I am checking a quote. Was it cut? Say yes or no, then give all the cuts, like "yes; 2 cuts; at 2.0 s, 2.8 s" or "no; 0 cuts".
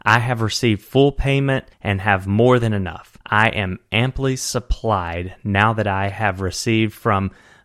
yes; 2 cuts; at 1.7 s, 3.2 s